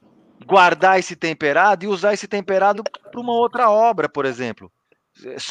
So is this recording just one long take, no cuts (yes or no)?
yes